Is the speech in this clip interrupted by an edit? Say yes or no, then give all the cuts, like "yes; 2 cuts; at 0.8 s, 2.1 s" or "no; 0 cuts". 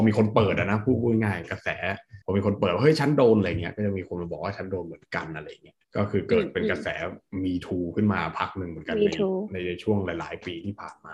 yes; 2 cuts; at 2.2 s, 5.8 s